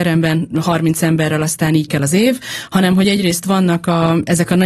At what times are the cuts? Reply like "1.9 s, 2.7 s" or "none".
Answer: 1.9 s